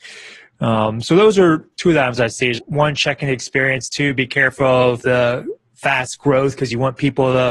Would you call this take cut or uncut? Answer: cut